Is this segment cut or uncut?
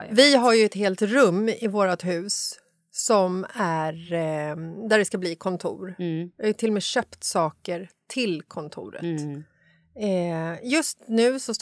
uncut